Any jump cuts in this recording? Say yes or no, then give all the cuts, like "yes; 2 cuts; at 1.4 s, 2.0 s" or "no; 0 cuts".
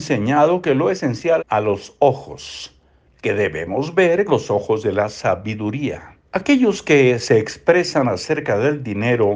yes; 4 cuts; at 1.4 s, 3.1 s, 4.3 s, 6.3 s